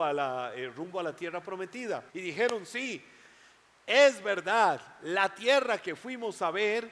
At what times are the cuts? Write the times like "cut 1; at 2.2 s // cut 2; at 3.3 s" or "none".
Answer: cut 1; at 2.1 s